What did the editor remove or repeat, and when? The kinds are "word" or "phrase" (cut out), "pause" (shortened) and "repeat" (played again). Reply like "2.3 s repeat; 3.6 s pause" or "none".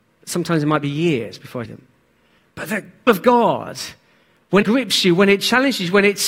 1.6 s word; 3.1 s word; 4.6 s word